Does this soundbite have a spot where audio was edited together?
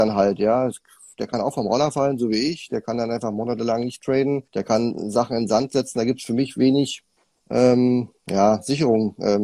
yes; 2 cuts; at 4.5 s, 7.2 s

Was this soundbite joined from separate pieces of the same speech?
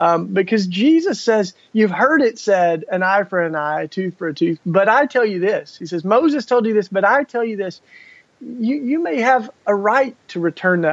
no; 0 cuts

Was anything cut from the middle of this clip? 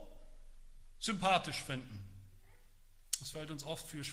no; 0 cuts

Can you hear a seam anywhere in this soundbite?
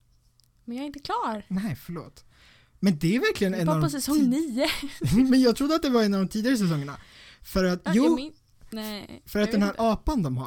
no; 0 cuts

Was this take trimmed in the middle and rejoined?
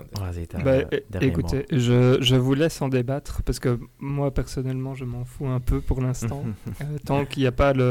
no; 0 cuts

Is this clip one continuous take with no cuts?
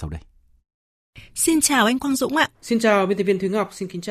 no; 1 cut; at 2.5 s

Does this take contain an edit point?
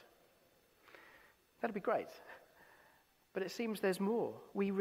no; 0 cuts

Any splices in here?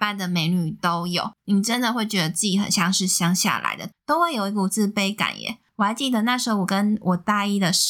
no; 0 cuts

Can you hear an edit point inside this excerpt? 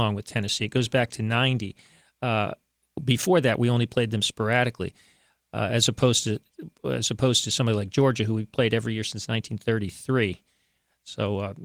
no; 0 cuts

